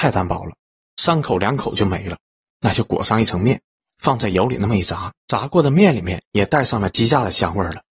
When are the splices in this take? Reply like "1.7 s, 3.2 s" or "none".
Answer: 5.2 s